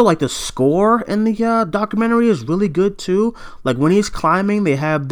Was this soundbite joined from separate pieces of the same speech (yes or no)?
no